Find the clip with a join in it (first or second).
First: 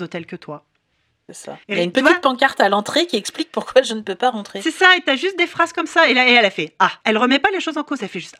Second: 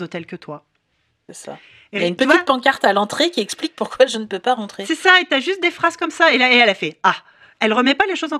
first